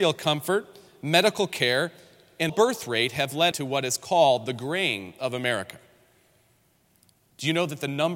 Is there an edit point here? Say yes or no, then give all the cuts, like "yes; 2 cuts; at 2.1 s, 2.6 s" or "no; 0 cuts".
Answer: yes; 2 cuts; at 2.5 s, 3.5 s